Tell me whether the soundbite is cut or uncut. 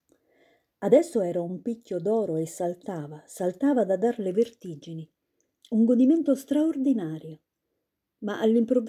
uncut